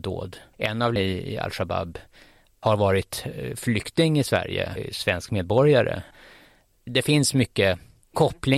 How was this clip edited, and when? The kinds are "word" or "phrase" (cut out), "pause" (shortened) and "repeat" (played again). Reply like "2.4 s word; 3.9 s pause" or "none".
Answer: 1.0 s word; 4.8 s word